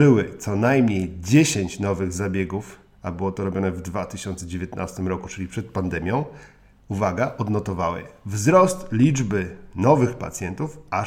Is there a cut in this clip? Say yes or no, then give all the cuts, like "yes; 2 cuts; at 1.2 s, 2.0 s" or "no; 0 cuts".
no; 0 cuts